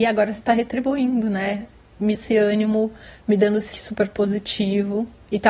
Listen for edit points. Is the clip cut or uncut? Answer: cut